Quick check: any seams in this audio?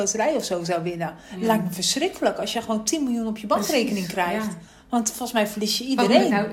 no; 0 cuts

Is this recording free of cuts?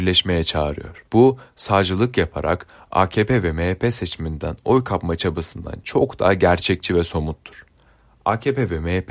no; 1 cut; at 1.1 s

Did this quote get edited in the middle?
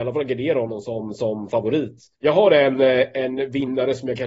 yes; 1 cut; at 2.1 s

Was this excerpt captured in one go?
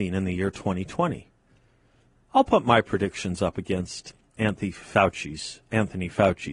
yes; 0 cuts

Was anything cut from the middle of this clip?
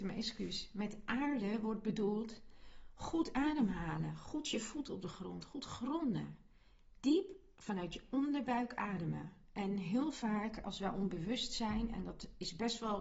no; 0 cuts

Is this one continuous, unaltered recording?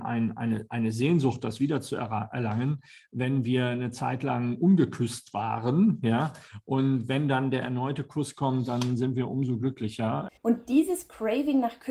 no; 1 cut; at 10.4 s

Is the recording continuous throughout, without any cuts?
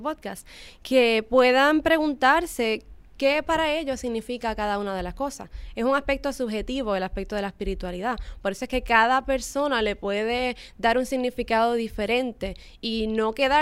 yes; 0 cuts

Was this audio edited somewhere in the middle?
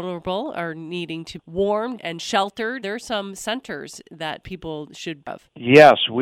yes; 4 cuts; at 1.4 s, 2.0 s, 2.8 s, 5.3 s

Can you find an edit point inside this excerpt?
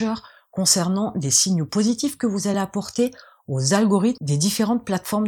no; 0 cuts

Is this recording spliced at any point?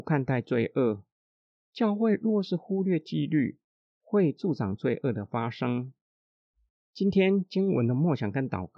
no; 0 cuts

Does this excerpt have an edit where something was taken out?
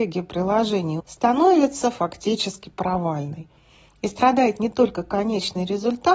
yes; 1 cut; at 1.0 s

